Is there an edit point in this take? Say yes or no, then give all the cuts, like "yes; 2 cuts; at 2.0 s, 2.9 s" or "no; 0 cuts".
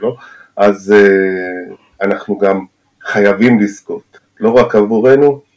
no; 0 cuts